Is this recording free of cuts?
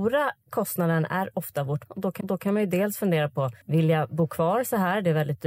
no; 3 cuts; at 1.9 s, 2.2 s, 3.6 s

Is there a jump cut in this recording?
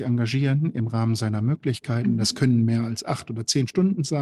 no; 0 cuts

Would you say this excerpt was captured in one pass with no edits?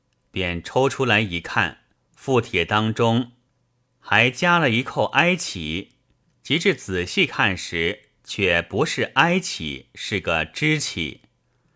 no; 2 cuts; at 2.0 s, 6.3 s

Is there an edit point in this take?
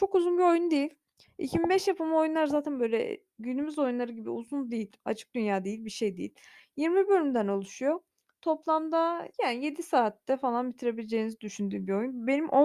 yes; 1 cut; at 9.3 s

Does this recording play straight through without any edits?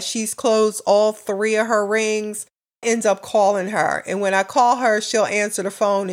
no; 1 cut; at 2.8 s

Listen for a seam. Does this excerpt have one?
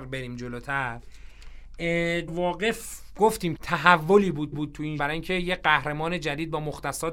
yes; 4 cuts; at 2.3 s, 3.6 s, 4.5 s, 5.0 s

